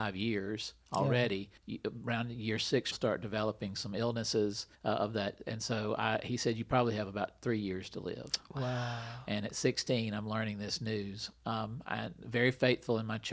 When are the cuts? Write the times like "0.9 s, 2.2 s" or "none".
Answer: 1.6 s, 2.9 s, 4.7 s